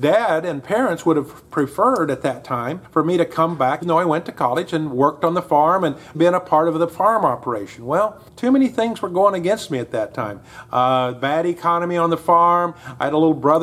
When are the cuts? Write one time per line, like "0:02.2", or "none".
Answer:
0:02.8
0:03.8
0:06.1
0:08.3